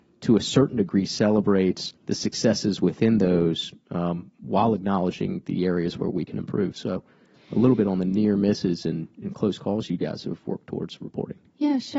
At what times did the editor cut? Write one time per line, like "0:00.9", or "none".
0:02.0